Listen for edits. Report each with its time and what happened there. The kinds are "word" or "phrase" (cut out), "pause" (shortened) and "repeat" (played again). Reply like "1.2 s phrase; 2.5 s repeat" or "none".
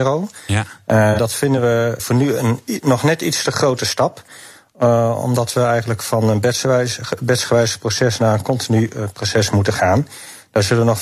2.0 s word